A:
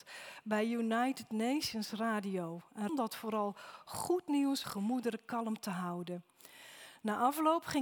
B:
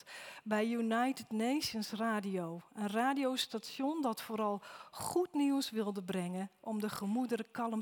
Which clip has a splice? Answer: A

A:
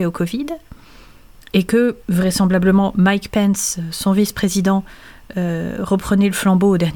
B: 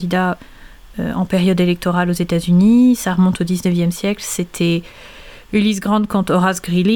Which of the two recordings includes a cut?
A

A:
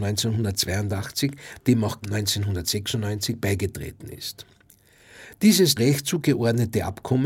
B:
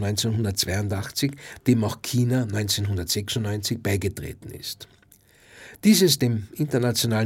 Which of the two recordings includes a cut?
A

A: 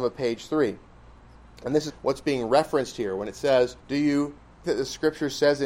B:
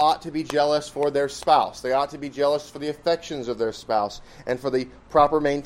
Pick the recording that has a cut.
A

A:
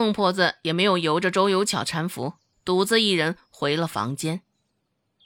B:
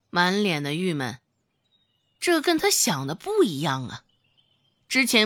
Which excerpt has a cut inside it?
A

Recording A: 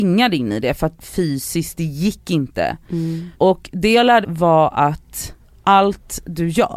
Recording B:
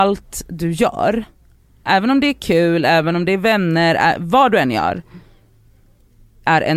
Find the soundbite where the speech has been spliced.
A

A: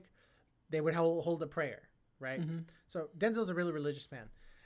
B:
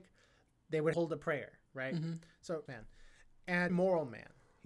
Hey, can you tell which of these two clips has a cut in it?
B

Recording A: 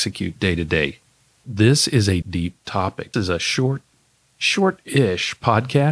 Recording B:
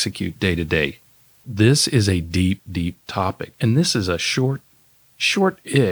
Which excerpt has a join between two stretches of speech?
A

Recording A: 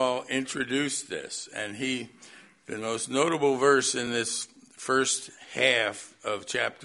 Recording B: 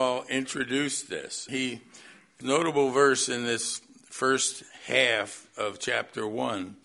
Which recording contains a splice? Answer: B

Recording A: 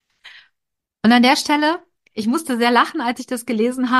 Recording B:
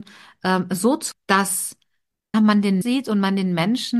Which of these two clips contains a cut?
B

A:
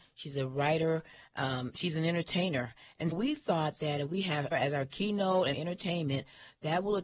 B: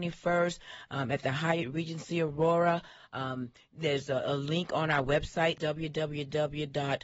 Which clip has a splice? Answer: A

